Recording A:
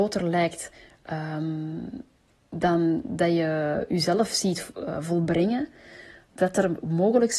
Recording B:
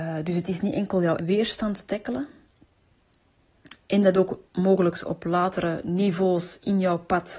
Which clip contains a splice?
B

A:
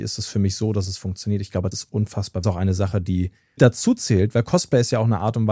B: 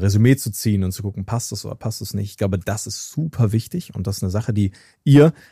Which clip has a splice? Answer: A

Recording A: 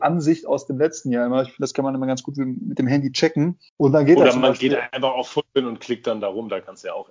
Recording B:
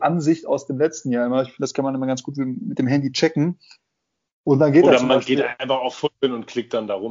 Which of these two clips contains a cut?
A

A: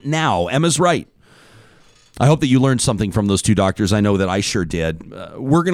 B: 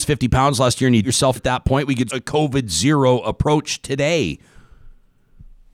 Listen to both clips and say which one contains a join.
B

